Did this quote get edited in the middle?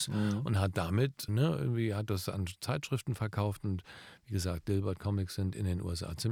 yes; 1 cut; at 1.3 s

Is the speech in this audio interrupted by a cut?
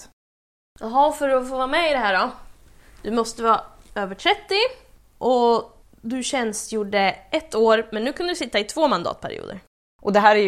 no; 0 cuts

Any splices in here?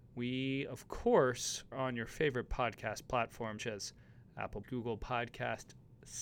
yes; 3 cuts; at 1.7 s, 3.6 s, 4.6 s

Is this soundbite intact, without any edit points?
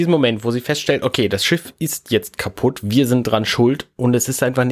yes; 0 cuts

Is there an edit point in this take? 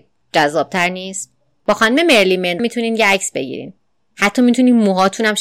yes; 1 cut; at 2.6 s

